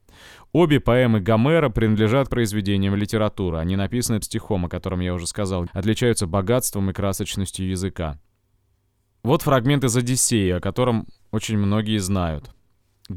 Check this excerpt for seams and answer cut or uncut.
cut